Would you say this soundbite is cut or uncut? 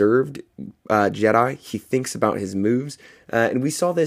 uncut